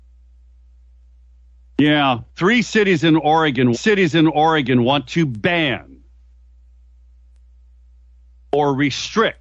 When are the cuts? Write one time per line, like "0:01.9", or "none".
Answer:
0:02.3
0:03.7